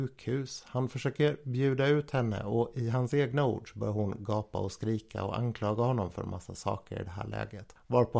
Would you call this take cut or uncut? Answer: uncut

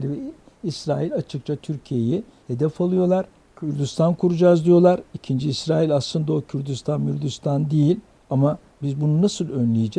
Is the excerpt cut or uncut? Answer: uncut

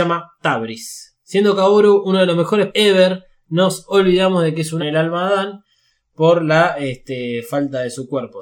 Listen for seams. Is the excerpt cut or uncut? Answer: cut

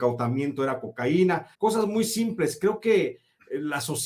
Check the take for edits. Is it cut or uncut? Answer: cut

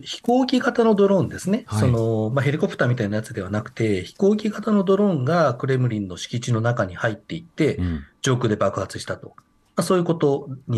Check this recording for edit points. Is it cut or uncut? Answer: uncut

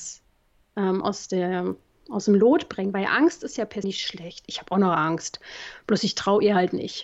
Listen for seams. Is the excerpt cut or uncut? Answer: cut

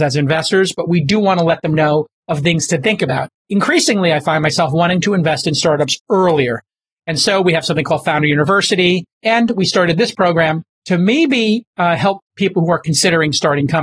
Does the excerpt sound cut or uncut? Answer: cut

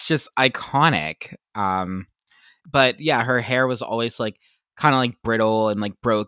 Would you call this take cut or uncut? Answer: uncut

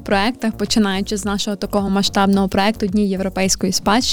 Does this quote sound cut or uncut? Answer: uncut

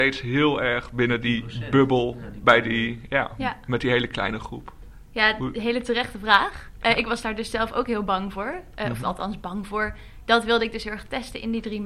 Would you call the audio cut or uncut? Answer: uncut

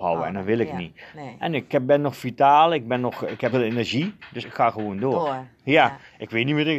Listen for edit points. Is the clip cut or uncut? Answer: cut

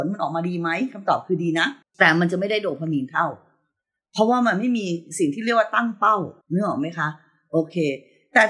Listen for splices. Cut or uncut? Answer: cut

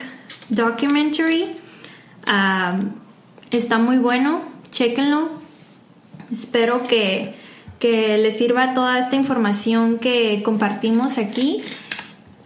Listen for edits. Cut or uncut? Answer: uncut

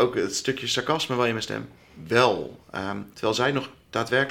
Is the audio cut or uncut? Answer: cut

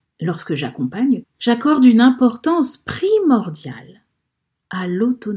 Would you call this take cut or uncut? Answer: cut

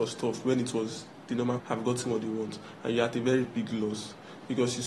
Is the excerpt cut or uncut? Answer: cut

